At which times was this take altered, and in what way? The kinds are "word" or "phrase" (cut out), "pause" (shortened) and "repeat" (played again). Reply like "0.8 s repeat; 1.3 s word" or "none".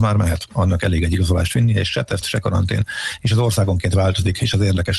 none